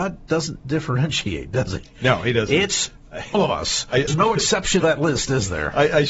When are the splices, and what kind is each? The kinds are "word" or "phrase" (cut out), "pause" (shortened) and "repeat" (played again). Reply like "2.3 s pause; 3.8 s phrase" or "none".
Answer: 3.3 s word; 4.1 s word; 4.8 s word